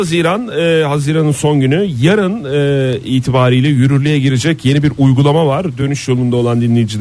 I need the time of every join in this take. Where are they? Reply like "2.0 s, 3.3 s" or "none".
none